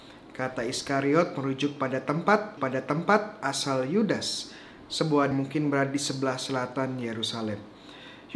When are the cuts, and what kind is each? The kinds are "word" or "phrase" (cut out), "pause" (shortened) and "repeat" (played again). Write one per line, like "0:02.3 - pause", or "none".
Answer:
0:02.6 - repeat
0:05.3 - phrase